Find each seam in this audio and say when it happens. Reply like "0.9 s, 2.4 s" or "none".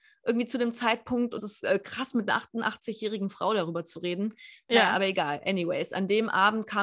1.4 s

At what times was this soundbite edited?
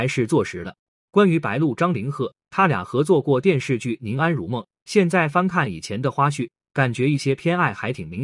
none

